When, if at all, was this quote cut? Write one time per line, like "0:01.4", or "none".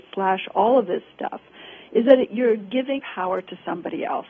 0:02.3
0:03.0